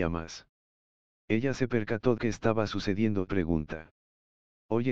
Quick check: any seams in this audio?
yes; 2 cuts; at 2.2 s, 3.3 s

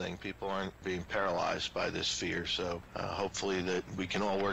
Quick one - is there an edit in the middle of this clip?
no; 0 cuts

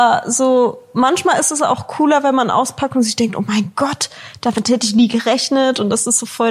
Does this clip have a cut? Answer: no; 0 cuts

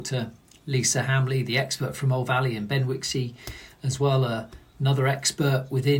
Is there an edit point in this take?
no; 0 cuts

